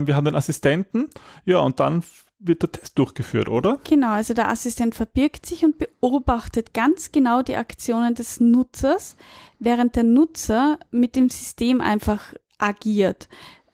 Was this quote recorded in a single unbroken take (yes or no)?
yes